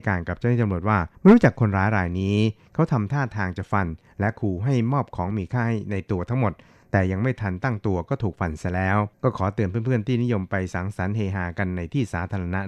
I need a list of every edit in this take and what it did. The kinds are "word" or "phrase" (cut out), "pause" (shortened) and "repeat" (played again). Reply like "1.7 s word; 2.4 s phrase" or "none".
1.1 s pause; 9.1 s pause